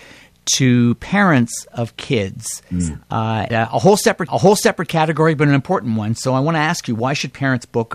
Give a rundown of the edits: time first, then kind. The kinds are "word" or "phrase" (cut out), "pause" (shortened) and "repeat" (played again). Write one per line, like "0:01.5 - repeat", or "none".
0:03.5 - word
0:04.3 - repeat